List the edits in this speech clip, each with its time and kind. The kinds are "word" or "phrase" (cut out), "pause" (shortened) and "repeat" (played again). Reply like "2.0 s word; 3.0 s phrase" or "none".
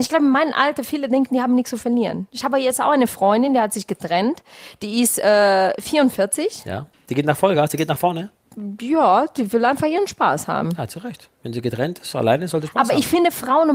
6.9 s pause